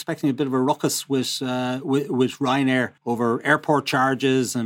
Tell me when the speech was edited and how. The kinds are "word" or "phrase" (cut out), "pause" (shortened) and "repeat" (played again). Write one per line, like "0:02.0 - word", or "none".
0:03.0 - pause